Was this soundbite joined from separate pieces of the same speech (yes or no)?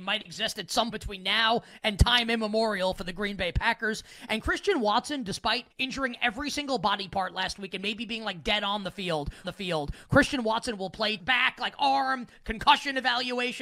yes